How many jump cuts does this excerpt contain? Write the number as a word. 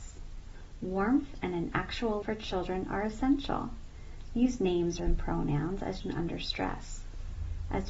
three